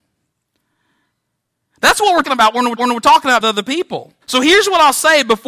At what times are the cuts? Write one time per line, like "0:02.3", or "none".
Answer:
0:02.2
0:02.8
0:03.4
0:04.2

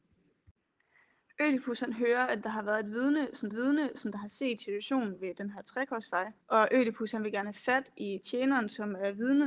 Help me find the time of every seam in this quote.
0:03.5
0:06.4

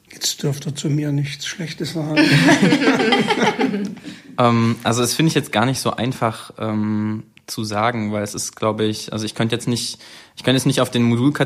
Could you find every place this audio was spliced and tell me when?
none

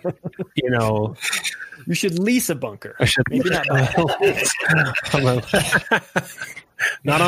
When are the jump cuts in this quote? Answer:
none

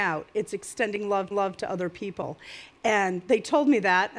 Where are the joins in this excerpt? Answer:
0:01.3

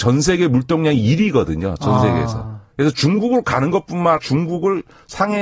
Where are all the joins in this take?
0:04.2

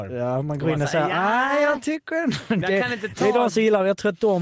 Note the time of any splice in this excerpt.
none

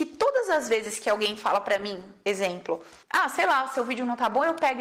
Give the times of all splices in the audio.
0:03.0

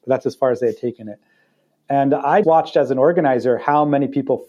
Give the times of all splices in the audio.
0:02.4

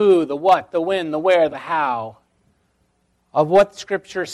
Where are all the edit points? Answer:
0:01.5

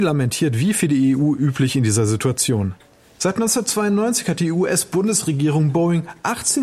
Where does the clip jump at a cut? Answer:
none

